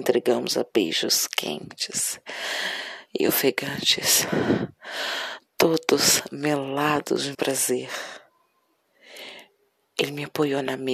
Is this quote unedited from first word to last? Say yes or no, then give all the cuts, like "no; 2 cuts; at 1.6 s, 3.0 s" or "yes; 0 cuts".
no; 1 cut; at 7.3 s